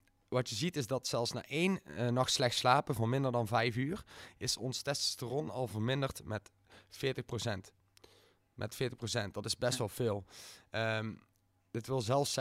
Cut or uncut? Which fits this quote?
uncut